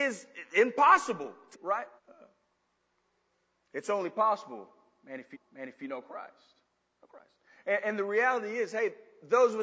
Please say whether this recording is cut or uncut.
cut